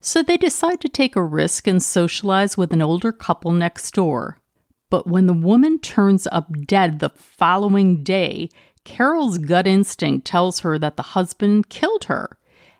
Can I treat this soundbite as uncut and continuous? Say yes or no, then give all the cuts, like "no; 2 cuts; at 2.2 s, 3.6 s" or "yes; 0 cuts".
yes; 0 cuts